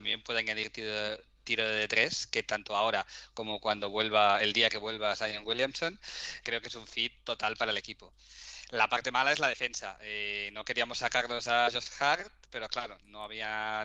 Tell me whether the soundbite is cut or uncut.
cut